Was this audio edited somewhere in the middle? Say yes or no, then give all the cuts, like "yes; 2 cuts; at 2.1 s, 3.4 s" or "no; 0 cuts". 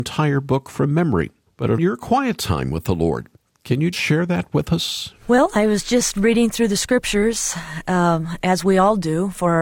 yes; 5 cuts; at 1.5 s, 1.8 s, 3.4 s, 3.9 s, 5.2 s